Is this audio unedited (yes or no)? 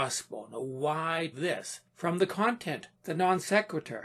no